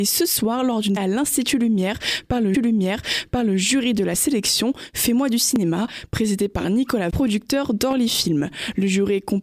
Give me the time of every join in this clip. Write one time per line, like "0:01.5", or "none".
0:01.0
0:02.5
0:07.1